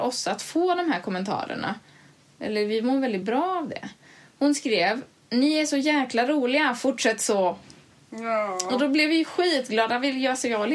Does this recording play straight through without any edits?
yes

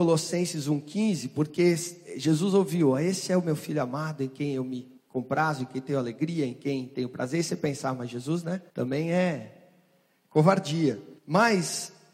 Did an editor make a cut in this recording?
yes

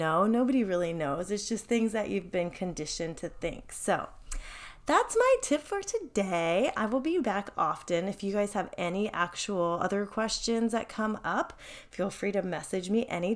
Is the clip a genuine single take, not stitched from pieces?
yes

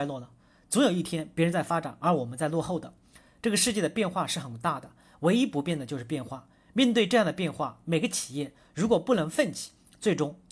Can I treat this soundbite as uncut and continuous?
yes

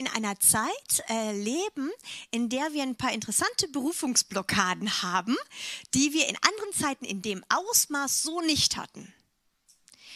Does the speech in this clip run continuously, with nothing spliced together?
yes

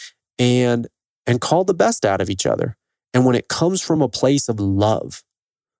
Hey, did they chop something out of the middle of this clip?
no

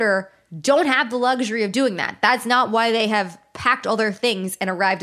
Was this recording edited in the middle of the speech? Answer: no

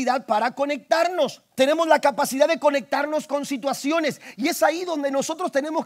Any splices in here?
yes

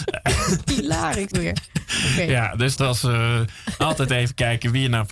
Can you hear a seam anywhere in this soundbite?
yes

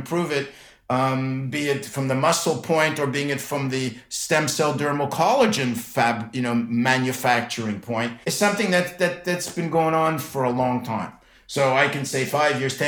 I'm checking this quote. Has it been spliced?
yes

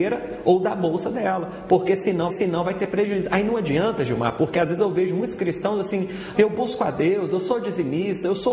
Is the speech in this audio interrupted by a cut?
yes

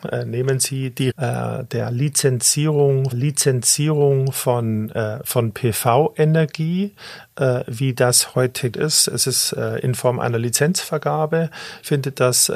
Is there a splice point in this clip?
yes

